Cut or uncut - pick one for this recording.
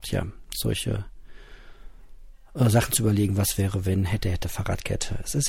uncut